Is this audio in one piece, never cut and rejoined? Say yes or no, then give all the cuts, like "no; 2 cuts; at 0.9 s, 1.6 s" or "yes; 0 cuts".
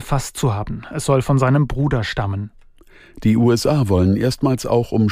yes; 0 cuts